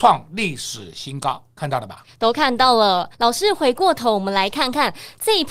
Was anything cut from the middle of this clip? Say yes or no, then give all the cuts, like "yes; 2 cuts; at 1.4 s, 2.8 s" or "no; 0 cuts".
yes; 1 cut; at 3.1 s